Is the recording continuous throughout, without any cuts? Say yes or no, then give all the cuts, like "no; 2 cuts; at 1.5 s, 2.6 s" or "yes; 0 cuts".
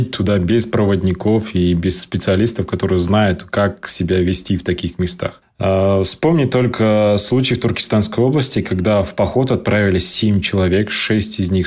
yes; 0 cuts